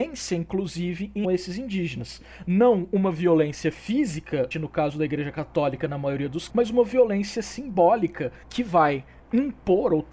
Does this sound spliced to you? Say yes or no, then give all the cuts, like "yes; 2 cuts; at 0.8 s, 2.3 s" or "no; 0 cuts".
yes; 4 cuts; at 1.2 s, 4.5 s, 6.5 s, 8.4 s